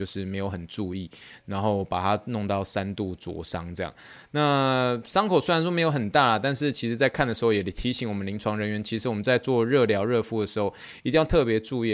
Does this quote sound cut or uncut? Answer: uncut